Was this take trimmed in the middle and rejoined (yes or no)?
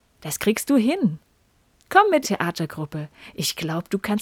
yes